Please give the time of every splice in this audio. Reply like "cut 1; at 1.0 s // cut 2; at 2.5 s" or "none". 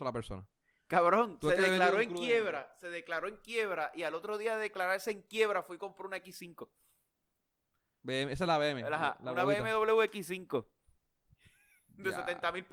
none